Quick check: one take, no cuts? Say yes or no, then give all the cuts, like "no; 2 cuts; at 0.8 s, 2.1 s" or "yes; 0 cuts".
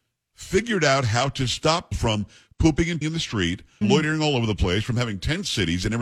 no; 3 cuts; at 1.9 s, 3.0 s, 3.8 s